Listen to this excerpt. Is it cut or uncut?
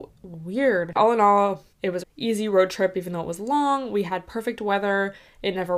cut